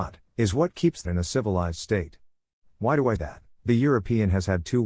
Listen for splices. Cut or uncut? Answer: cut